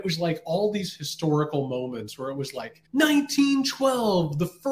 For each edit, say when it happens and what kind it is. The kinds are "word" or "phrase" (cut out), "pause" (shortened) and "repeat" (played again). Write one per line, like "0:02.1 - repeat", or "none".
0:02.8 - pause

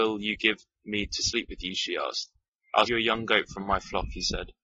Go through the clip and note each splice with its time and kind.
0:02.9 - word

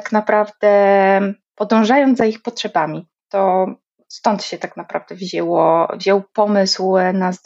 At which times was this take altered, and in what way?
none

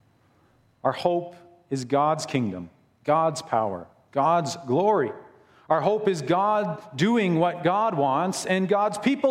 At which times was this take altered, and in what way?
none

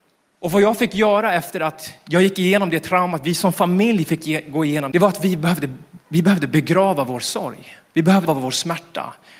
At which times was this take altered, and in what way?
0:04.9 - phrase
0:06.0 - pause
0:08.3 - word

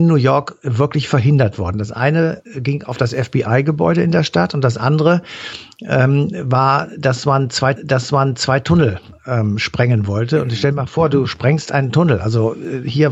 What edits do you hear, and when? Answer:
0:07.8 - repeat

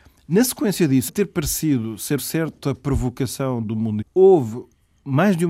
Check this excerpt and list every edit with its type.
0:01.1 - word
0:02.2 - word
0:04.0 - word

